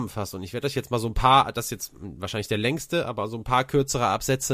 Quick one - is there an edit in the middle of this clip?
no; 0 cuts

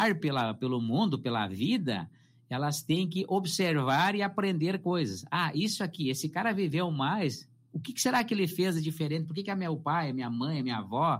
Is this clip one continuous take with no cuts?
yes; 0 cuts

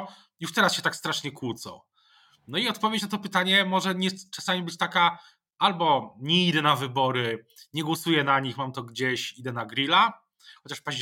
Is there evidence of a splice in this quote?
no; 0 cuts

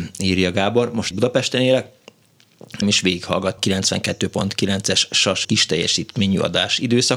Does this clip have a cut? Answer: yes; 4 cuts; at 1.1 s, 2.8 s, 3.6 s, 5.4 s

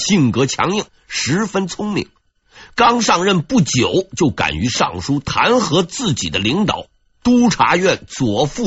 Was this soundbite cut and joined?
no; 0 cuts

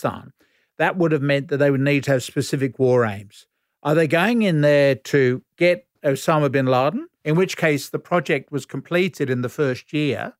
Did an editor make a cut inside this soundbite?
yes; 2 cuts; at 5.9 s, 7.2 s

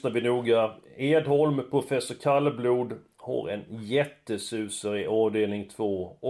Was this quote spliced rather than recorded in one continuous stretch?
no; 0 cuts

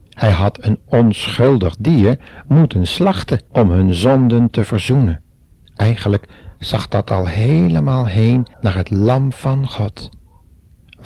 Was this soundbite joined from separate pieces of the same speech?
yes; 3 cuts; at 3.5 s, 5.5 s, 8.5 s

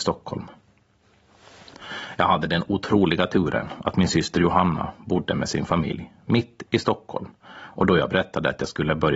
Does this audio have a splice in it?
no; 0 cuts

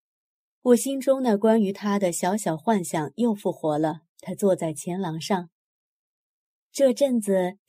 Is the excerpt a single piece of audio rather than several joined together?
no; 1 cut; at 4.1 s

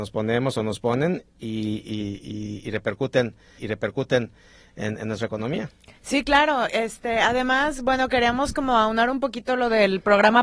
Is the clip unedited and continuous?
no; 1 cut; at 3.6 s

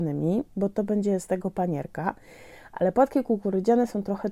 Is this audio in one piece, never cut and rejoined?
yes; 0 cuts

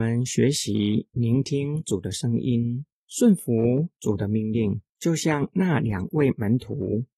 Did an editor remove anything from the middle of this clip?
yes; 2 cuts; at 2.9 s, 4.9 s

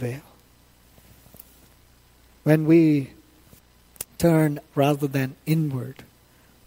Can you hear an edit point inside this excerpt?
yes; 1 cut; at 4.7 s

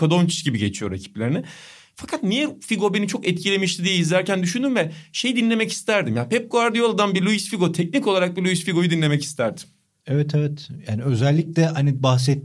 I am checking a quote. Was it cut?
no; 0 cuts

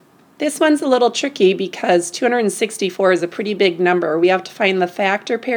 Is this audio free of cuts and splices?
yes; 0 cuts

